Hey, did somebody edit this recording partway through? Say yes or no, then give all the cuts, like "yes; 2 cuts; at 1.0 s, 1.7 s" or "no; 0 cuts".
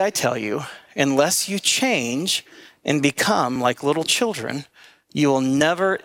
no; 0 cuts